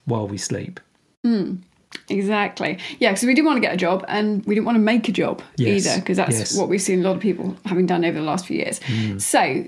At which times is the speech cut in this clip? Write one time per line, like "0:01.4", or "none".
0:04.5